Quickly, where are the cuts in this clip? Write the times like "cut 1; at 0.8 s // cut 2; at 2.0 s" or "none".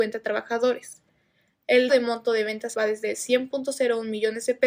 cut 1; at 1.9 s // cut 2; at 2.7 s